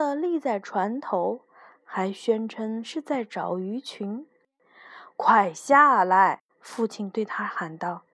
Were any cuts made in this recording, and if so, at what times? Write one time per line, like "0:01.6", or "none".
0:06.5